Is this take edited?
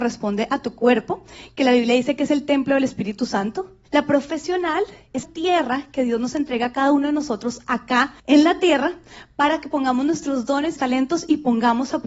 yes; 4 cuts; at 3.8 s, 5.2 s, 8.2 s, 10.8 s

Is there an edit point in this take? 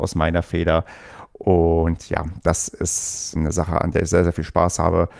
yes; 1 cut; at 3.4 s

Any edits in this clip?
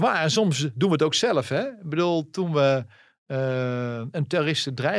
no; 0 cuts

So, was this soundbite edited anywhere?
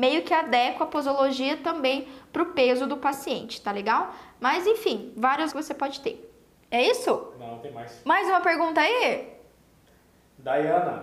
yes; 1 cut; at 5.5 s

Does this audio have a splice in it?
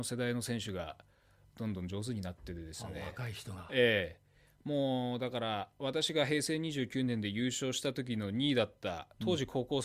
no; 0 cuts

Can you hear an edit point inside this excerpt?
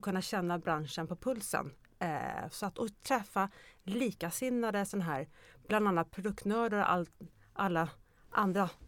no; 0 cuts

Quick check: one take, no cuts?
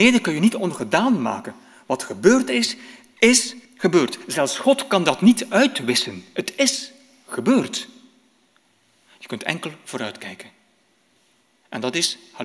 no; 1 cut; at 3.6 s

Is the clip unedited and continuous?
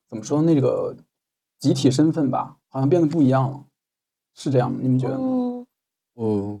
no; 1 cut; at 2.6 s

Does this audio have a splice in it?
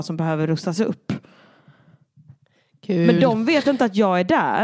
no; 0 cuts

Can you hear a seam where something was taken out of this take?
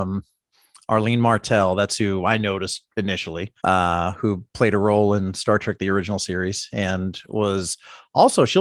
yes; 1 cut; at 3.6 s

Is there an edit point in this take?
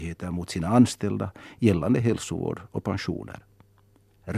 no; 0 cuts

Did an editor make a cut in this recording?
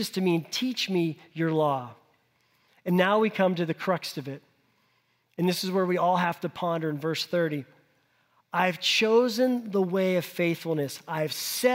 no; 0 cuts

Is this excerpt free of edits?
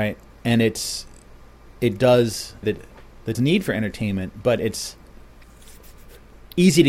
no; 2 cuts; at 2.6 s, 3.3 s

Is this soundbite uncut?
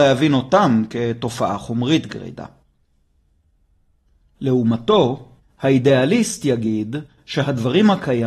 yes; 0 cuts

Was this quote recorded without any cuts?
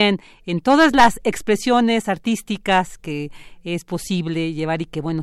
yes; 0 cuts

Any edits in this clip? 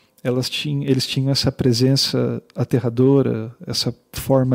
no; 0 cuts

